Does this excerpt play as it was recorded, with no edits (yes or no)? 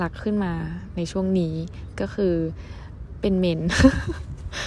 no